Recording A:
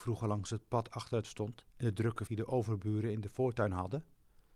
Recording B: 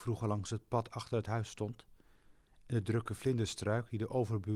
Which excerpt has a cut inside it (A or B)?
A